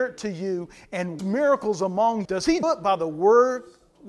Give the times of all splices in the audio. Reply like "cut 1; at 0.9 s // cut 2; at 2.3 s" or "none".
cut 1; at 1.2 s // cut 2; at 2.2 s // cut 3; at 2.6 s

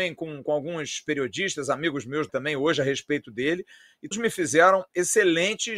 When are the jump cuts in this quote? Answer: cut 1; at 2.3 s // cut 2; at 4.1 s

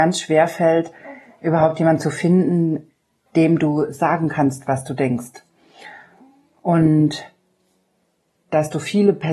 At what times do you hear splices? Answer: none

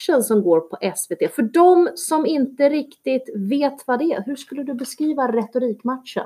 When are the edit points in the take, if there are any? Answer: none

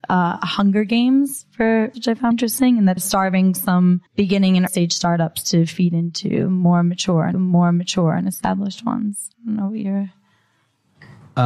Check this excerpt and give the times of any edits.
cut 1; at 1.9 s // cut 2; at 2.3 s // cut 3; at 3.0 s // cut 4; at 4.1 s // cut 5; at 4.7 s // cut 6; at 7.3 s // cut 7; at 9.3 s

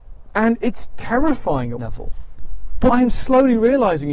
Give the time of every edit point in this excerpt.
cut 1; at 1.8 s // cut 2; at 2.9 s

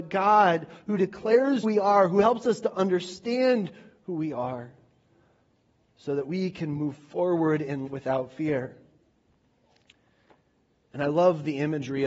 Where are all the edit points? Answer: cut 1; at 1.6 s // cut 2; at 7.9 s

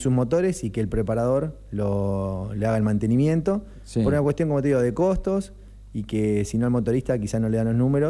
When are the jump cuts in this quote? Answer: none

